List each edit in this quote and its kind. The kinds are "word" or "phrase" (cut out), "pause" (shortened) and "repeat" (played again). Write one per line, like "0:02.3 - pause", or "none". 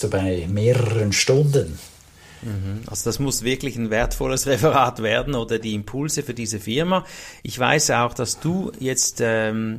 none